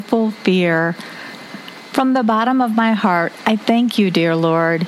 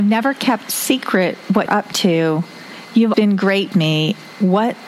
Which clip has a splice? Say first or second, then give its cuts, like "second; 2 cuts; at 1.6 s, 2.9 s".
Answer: second; 3 cuts; at 1.7 s, 3.1 s, 3.7 s